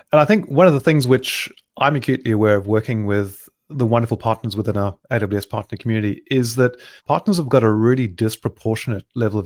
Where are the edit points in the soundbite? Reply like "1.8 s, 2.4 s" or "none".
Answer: 7.0 s